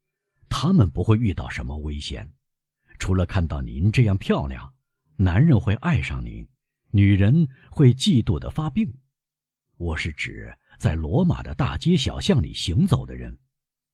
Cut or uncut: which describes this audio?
uncut